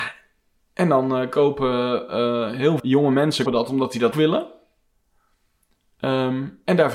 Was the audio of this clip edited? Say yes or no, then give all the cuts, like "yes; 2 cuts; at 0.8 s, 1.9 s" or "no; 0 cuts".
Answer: yes; 3 cuts; at 2.8 s, 3.5 s, 4.1 s